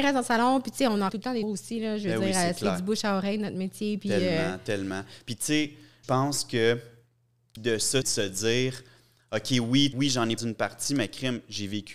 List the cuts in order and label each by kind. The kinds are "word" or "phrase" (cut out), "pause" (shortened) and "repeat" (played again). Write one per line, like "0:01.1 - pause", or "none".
0:01.1 - word
0:01.4 - word
0:06.0 - word
0:07.6 - word
0:08.0 - word
0:09.9 - word
0:10.4 - word

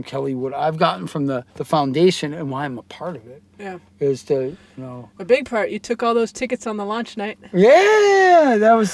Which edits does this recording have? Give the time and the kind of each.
0:01.5 - pause

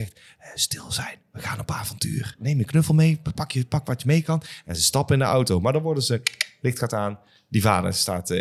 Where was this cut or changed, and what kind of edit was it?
none

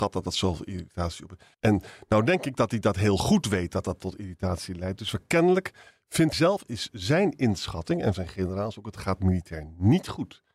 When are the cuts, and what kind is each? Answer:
0:01.5 - pause
0:06.3 - word
0:08.1 - word

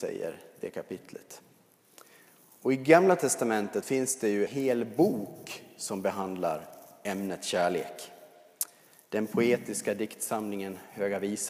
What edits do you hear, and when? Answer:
0:03.8 - word
0:04.5 - word

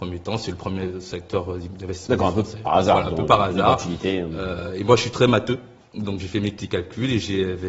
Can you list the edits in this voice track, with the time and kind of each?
0:06.2 - word

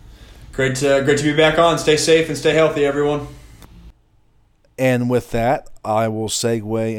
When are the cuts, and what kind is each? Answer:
none

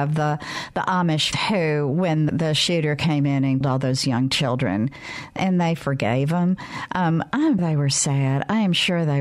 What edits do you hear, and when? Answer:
0:01.3 - word
0:02.3 - word
0:03.6 - word
0:07.6 - word

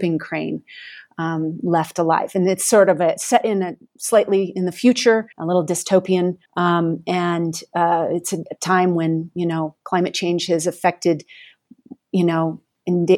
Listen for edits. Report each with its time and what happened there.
0:05.3 - pause
0:06.4 - pause
0:09.8 - pause

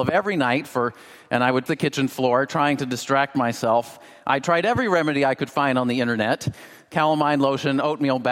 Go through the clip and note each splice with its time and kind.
0:01.7 - word

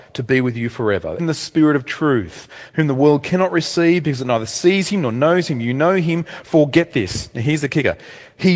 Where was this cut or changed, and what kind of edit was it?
0:01.2 - word

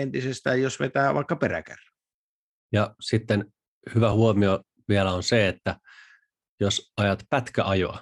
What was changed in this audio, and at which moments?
none

